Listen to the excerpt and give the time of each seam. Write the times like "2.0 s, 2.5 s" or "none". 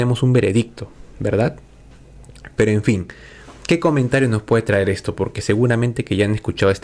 none